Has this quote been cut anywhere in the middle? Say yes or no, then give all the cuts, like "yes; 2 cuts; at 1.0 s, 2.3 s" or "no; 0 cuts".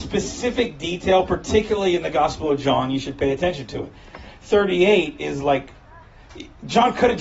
no; 0 cuts